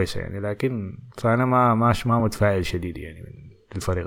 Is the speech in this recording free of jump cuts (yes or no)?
yes